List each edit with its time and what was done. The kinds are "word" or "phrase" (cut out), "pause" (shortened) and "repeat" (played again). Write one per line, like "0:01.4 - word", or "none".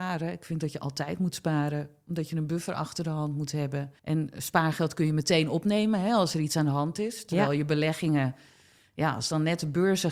0:04.0 - pause